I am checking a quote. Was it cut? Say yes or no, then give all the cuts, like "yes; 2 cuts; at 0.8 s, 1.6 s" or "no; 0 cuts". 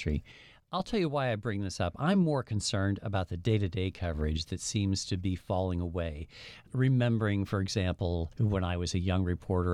no; 0 cuts